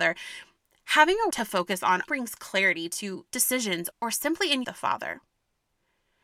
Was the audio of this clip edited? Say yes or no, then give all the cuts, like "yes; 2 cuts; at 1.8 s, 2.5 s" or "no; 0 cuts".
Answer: yes; 5 cuts; at 1.3 s, 2.1 s, 3.3 s, 3.9 s, 4.6 s